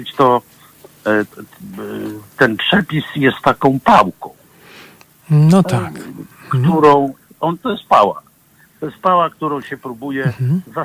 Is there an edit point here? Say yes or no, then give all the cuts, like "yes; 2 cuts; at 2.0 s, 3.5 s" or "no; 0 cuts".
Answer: no; 0 cuts